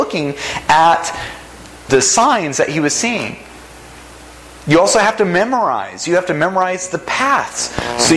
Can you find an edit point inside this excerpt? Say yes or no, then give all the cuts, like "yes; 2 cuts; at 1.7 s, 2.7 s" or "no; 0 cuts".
yes; 1 cut; at 1.9 s